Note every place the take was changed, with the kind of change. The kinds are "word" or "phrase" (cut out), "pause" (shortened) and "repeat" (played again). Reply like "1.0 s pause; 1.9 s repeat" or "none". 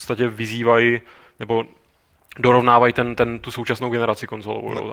none